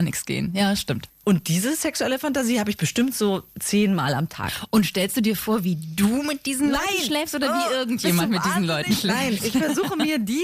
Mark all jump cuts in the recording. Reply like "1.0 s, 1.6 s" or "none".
none